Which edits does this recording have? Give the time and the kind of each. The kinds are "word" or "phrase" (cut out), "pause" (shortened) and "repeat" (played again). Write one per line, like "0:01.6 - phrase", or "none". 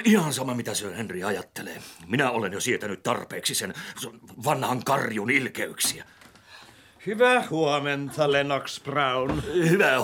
none